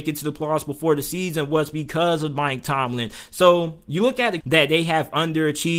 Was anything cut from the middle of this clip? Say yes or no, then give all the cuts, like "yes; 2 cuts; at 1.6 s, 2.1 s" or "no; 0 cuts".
yes; 1 cut; at 4.4 s